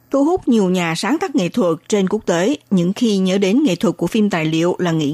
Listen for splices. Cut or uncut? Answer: uncut